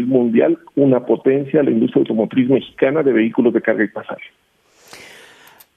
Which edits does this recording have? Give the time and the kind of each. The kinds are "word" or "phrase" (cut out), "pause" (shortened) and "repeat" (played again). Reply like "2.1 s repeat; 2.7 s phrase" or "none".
none